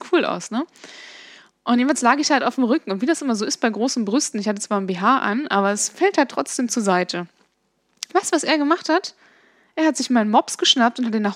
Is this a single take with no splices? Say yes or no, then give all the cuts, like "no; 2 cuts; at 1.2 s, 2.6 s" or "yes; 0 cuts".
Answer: yes; 0 cuts